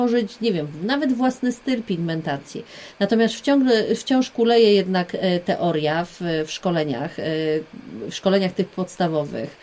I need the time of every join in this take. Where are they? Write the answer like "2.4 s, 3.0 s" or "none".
none